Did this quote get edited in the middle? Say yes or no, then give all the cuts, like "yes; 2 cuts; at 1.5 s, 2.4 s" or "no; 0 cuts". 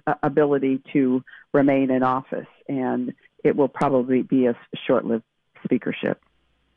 no; 0 cuts